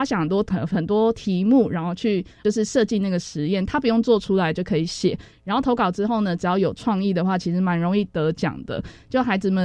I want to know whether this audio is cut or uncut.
uncut